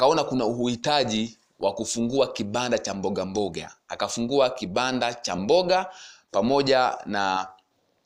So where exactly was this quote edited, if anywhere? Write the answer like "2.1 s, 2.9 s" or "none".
5.4 s